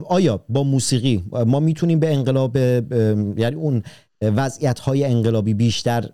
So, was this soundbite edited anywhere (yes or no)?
no